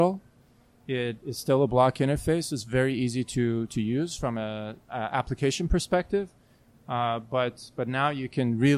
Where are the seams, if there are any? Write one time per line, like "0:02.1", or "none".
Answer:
none